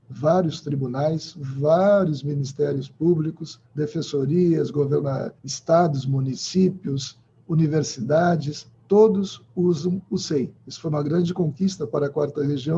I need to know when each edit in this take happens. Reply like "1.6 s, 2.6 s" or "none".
3.7 s, 5.4 s, 8.7 s, 10.6 s